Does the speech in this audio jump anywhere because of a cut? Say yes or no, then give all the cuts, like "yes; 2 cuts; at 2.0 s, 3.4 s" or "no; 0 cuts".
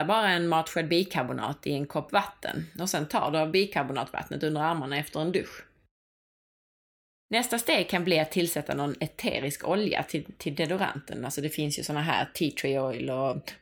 no; 0 cuts